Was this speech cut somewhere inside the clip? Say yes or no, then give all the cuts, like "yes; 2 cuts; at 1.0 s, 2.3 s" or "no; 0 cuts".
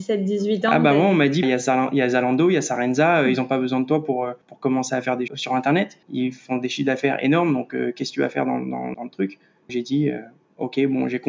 yes; 6 cuts; at 1.4 s, 4.4 s, 5.3 s, 6.0 s, 8.9 s, 9.7 s